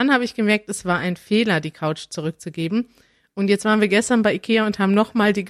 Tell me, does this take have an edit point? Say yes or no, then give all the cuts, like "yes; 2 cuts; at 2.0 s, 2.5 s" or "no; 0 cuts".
no; 0 cuts